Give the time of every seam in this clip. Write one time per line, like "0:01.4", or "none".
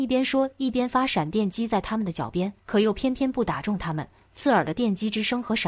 0:02.6